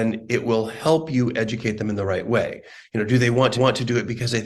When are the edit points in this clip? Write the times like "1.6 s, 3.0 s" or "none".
3.5 s

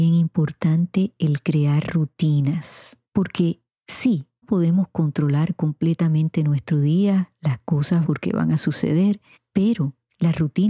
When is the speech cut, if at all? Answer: 3.0 s, 4.4 s, 8.0 s

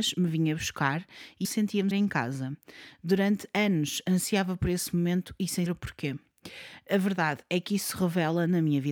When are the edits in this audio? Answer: 1.4 s, 1.9 s, 5.7 s

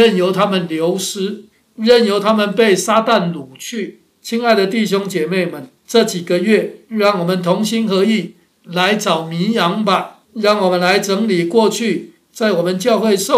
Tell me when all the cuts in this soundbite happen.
1.5 s, 4.1 s, 5.8 s, 10.2 s

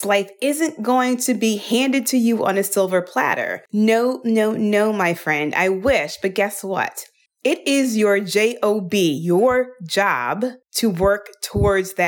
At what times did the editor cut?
3.7 s, 7.3 s, 10.6 s

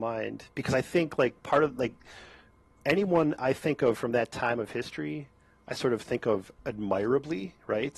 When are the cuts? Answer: none

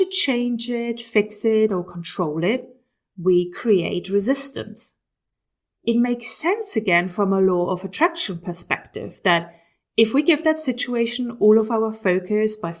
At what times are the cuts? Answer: none

